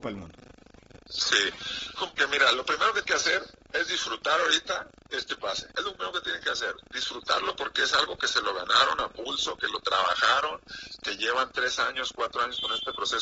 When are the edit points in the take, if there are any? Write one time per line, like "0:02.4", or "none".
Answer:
0:02.0
0:03.0
0:05.7